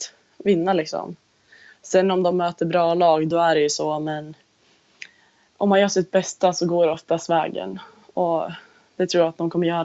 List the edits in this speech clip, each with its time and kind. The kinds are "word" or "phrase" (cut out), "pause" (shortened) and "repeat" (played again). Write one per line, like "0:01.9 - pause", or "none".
none